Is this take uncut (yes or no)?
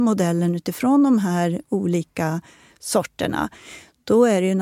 yes